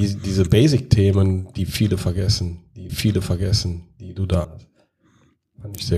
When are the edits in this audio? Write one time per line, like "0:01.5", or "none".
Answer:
0:02.9
0:04.4